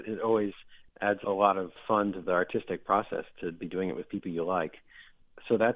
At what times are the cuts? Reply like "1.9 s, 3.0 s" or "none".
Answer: none